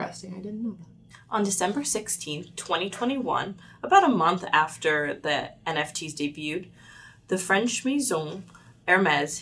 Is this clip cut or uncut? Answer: uncut